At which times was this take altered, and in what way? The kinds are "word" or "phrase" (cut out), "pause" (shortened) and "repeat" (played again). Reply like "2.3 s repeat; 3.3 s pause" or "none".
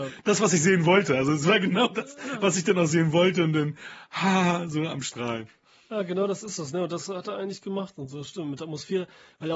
none